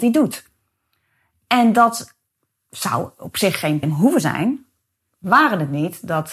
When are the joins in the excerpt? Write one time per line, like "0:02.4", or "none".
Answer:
0:03.8